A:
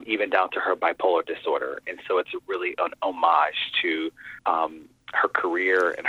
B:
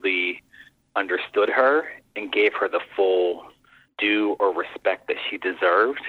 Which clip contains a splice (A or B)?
A